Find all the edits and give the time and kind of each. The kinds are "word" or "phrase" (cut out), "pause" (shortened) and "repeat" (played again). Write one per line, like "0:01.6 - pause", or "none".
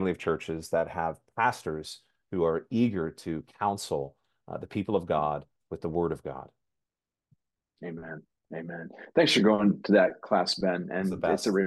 none